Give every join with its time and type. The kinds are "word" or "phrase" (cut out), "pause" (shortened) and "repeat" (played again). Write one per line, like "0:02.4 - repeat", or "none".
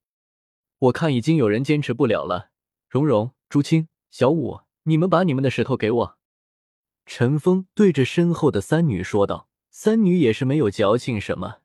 0:02.6 - pause
0:03.4 - pause
0:04.0 - pause
0:04.7 - pause
0:06.2 - pause
0:09.6 - pause